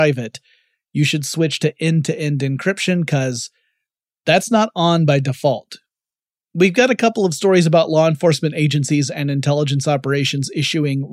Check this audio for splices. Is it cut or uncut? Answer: uncut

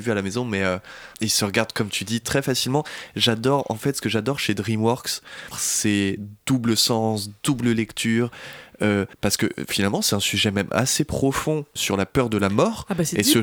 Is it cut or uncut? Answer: cut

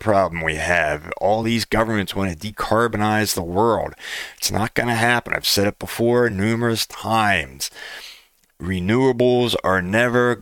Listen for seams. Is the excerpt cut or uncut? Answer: uncut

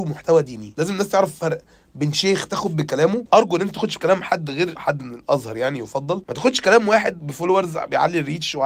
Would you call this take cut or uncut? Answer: uncut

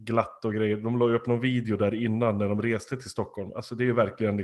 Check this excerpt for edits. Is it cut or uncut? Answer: uncut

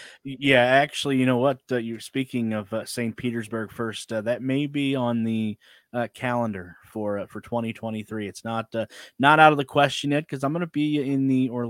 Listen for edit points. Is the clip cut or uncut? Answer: uncut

